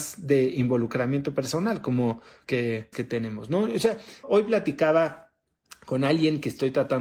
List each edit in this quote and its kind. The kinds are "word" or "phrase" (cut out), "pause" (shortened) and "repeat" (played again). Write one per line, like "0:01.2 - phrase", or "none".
0:02.4 - phrase
0:02.9 - phrase
0:04.2 - word

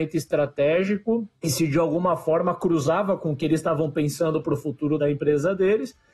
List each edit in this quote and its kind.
none

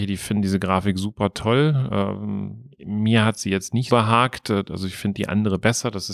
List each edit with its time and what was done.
0:02.7 - pause
0:03.9 - word

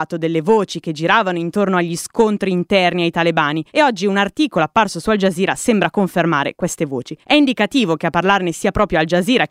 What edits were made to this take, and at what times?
0:03.7 - pause
0:07.2 - pause

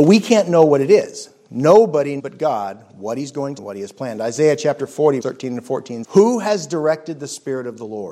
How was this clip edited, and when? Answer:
0:02.2 - word
0:03.6 - phrase
0:05.2 - word
0:06.0 - word

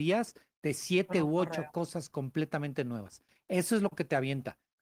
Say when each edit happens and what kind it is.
none

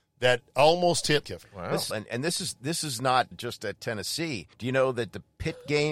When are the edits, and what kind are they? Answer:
0:01.2 - word
0:01.9 - phrase
0:03.3 - word
0:04.5 - pause

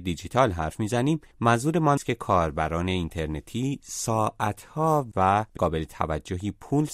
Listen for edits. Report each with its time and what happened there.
0:02.0 - word
0:05.1 - word
0:05.6 - word

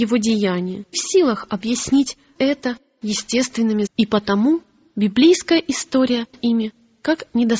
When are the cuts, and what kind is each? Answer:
0:00.9 - word
0:02.4 - word
0:03.9 - word
0:06.3 - word

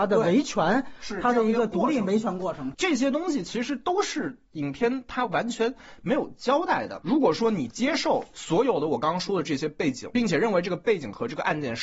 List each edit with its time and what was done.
0:10.1 - word

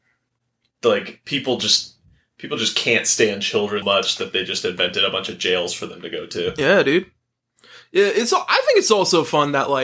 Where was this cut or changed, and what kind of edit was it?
0:03.8 - word

